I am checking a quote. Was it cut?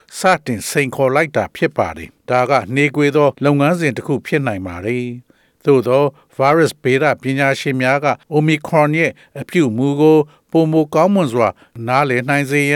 yes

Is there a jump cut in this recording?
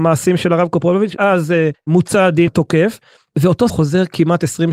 yes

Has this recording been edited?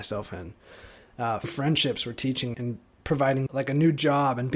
yes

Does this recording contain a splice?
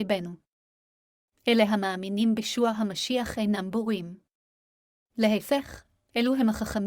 no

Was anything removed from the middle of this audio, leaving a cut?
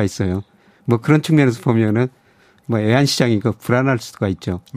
no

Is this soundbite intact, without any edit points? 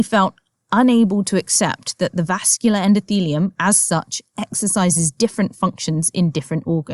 yes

